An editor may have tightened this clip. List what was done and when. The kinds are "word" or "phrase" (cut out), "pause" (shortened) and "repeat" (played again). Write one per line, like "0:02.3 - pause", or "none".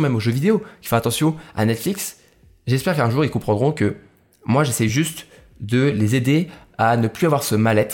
none